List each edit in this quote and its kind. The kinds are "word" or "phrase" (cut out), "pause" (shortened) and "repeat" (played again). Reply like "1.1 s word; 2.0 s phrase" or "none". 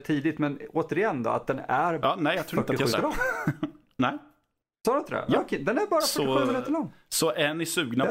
2.0 s word; 2.9 s word